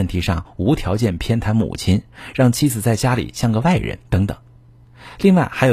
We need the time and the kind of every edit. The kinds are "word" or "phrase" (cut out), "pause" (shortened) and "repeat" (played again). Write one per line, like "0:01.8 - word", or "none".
0:04.0 - pause